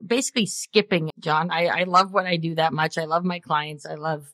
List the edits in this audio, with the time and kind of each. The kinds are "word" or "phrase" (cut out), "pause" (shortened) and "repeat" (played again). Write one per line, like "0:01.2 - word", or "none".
0:01.1 - phrase